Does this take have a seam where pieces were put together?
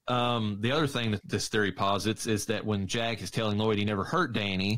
yes; 1 cut; at 1.2 s

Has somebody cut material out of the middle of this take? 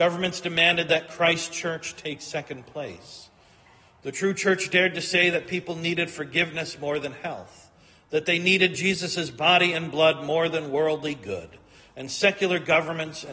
no; 0 cuts

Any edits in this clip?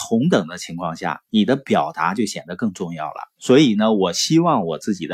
yes; 1 cut; at 3.4 s

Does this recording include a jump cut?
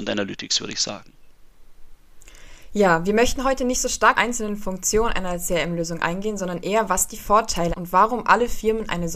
yes; 2 cuts; at 4.1 s, 7.7 s

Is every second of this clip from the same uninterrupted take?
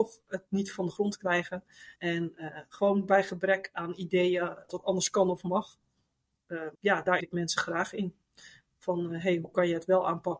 no; 4 cuts; at 2.0 s, 4.7 s, 6.7 s, 7.2 s

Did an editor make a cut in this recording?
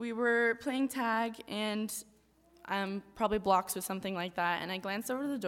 no; 0 cuts

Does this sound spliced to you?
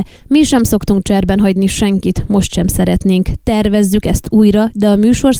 no; 0 cuts

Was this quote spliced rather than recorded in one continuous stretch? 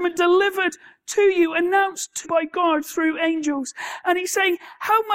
yes; 1 cut; at 2.2 s

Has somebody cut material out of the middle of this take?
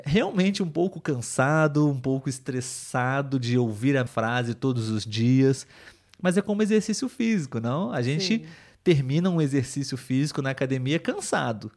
yes; 1 cut; at 4.1 s

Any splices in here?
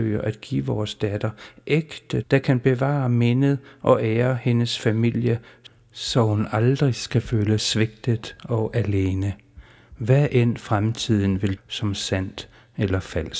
yes; 3 cuts; at 2.2 s, 7.6 s, 11.6 s

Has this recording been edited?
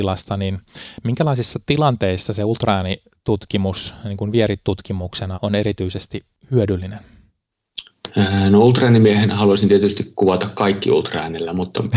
yes; 1 cut; at 5.3 s

